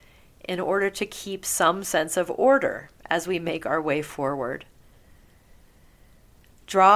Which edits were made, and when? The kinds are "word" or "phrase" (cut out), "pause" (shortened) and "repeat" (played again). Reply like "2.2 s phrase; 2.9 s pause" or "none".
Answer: none